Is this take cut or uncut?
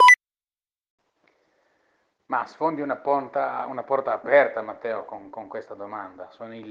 uncut